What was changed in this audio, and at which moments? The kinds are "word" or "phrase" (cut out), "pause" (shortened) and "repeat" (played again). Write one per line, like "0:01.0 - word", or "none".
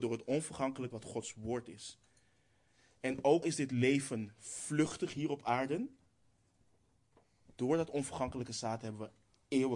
0:00.9 - word
0:03.4 - word